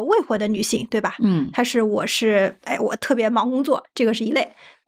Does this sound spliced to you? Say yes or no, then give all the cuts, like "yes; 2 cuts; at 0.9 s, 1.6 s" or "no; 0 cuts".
no; 0 cuts